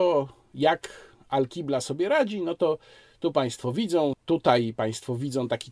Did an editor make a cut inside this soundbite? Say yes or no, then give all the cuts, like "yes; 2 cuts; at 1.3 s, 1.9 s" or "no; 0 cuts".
no; 0 cuts